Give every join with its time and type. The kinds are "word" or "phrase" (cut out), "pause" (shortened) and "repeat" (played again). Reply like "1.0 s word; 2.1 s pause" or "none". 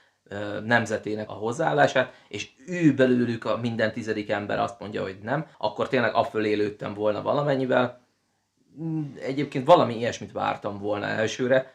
1.3 s word; 5.5 s pause

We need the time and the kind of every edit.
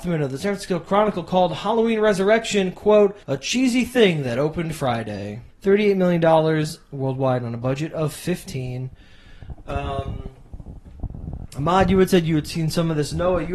3.2 s pause; 5.5 s pause

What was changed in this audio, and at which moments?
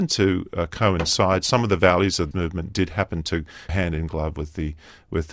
2.3 s word; 3.7 s word

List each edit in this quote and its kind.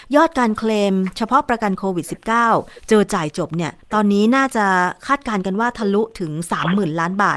3.8 s pause

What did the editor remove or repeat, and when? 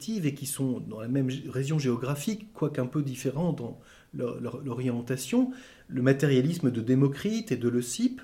none

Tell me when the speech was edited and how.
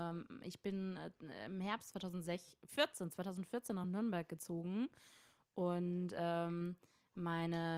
none

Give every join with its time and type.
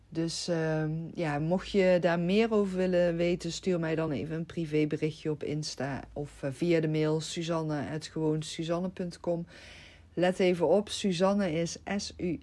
none

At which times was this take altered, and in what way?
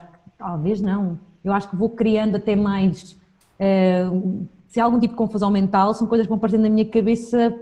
none

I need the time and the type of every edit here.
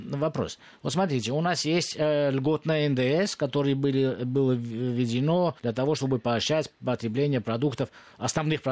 5.6 s pause

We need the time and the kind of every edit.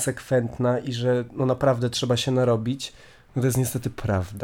none

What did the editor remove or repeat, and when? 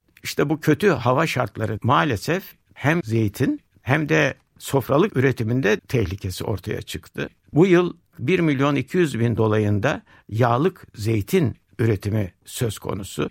1.8 s word; 3.0 s word; 5.1 s word; 5.8 s word; 8.1 s word; 9.4 s word

